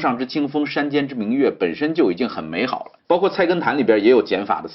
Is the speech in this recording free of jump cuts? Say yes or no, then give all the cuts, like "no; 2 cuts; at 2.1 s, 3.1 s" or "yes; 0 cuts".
no; 1 cut; at 3.0 s